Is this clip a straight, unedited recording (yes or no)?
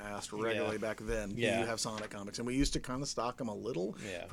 yes